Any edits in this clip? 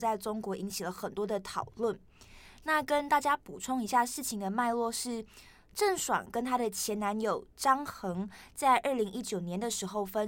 no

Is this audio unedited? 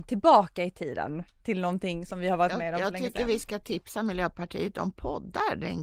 yes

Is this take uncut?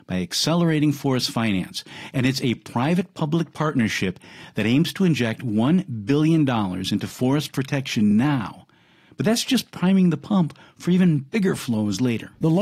yes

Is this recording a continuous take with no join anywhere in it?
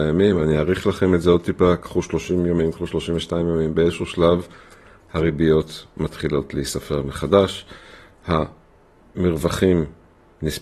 yes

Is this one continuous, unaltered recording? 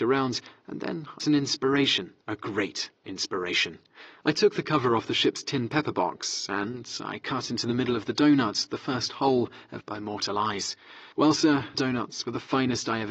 no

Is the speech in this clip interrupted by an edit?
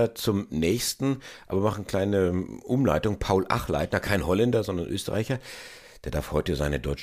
no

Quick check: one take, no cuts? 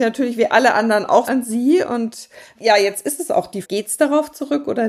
no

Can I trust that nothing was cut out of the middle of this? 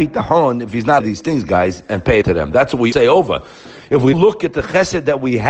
no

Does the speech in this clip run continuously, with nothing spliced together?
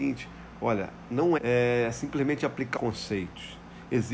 no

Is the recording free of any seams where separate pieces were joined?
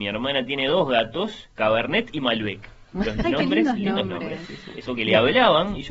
no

